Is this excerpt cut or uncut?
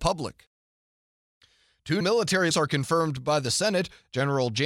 cut